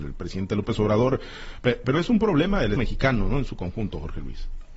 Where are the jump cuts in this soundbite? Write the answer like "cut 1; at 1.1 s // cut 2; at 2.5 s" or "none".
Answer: cut 1; at 2.8 s